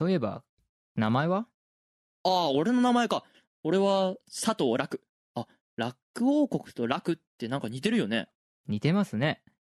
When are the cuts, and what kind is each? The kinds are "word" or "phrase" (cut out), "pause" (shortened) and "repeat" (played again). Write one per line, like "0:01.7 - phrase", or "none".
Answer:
none